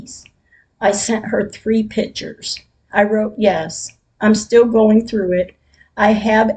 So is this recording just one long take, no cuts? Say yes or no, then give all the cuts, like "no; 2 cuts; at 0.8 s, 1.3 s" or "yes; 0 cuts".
yes; 0 cuts